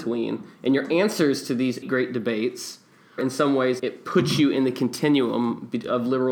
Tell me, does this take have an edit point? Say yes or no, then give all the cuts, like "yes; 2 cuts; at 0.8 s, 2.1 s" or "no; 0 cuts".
yes; 3 cuts; at 1.8 s, 3.2 s, 3.8 s